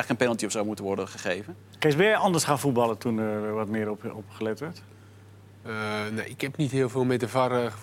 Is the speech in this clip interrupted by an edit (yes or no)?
no